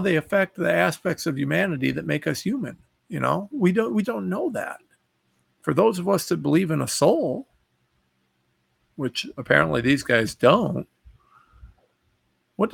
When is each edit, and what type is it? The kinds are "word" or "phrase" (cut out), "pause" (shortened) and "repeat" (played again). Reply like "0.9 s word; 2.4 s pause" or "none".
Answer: 2.9 s pause; 4.0 s word